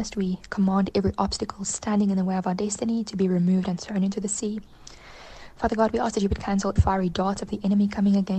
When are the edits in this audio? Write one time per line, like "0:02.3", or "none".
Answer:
0:06.8